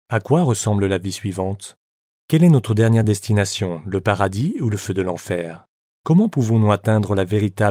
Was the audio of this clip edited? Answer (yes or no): no